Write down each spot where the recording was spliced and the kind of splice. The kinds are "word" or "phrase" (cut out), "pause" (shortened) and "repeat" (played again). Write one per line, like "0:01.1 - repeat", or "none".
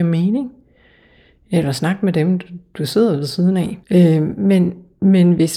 0:03.8 - pause